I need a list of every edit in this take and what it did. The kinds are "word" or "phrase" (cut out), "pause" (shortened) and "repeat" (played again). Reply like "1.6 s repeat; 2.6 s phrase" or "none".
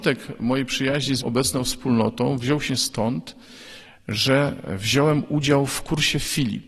1.2 s word; 2.7 s word